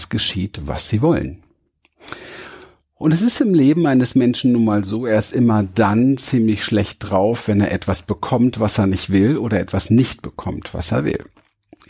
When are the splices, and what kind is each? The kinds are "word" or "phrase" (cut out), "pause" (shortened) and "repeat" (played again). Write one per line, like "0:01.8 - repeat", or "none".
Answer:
none